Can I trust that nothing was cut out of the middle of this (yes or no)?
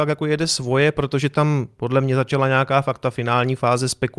yes